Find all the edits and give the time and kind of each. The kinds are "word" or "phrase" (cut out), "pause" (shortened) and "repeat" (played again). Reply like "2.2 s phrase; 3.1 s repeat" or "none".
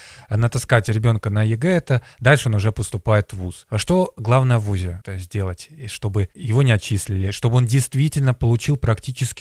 5.0 s word